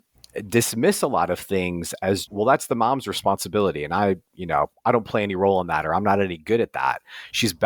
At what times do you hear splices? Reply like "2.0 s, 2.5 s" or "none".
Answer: 2.3 s